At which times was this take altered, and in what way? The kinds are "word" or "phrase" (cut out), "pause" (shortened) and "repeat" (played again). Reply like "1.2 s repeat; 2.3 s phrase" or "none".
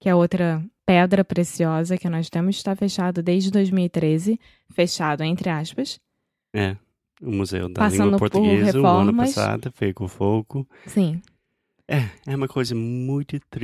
none